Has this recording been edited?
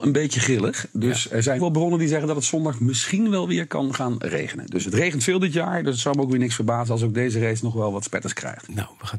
yes; 1 cut; at 1.6 s

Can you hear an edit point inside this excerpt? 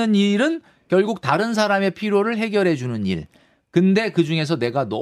no; 0 cuts

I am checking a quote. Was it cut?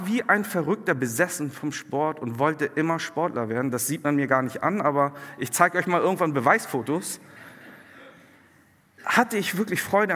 no; 0 cuts

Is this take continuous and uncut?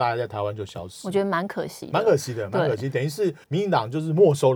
no; 1 cut; at 3.4 s

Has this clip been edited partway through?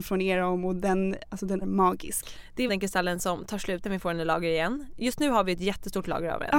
yes; 3 cuts; at 1.6 s, 2.7 s, 3.8 s

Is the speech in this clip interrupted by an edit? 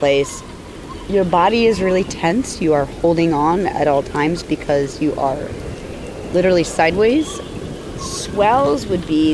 no; 0 cuts

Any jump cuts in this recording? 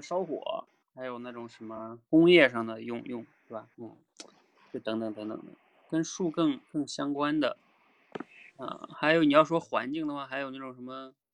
yes; 1 cut; at 3.7 s

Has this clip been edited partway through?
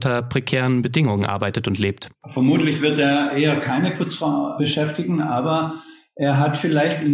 no; 0 cuts

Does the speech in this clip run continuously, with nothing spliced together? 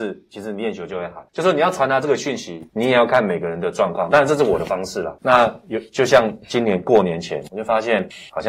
yes; 0 cuts

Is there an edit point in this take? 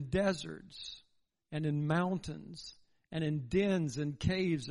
no; 0 cuts

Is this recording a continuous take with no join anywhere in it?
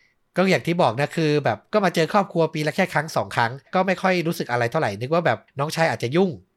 no; 2 cuts; at 3.7 s, 5.5 s

